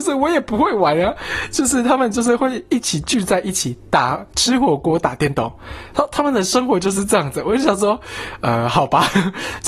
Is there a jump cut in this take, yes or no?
no